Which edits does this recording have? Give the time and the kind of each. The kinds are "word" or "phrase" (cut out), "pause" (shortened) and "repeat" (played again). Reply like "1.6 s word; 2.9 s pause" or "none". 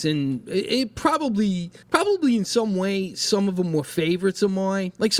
1.8 s pause